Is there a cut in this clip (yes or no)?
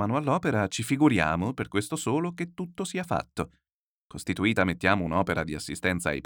no